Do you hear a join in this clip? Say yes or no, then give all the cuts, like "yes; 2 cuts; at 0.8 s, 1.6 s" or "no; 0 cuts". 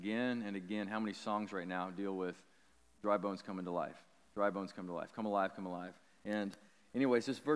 no; 0 cuts